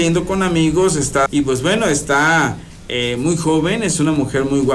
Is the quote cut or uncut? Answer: cut